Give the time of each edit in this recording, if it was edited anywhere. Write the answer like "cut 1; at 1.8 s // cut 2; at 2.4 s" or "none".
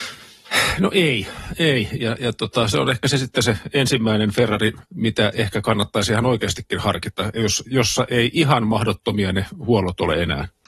cut 1; at 4.9 s